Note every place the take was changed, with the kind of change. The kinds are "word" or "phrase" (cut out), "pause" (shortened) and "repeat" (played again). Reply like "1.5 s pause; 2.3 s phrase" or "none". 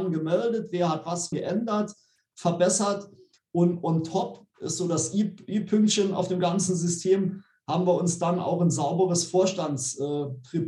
1.3 s word; 4.5 s word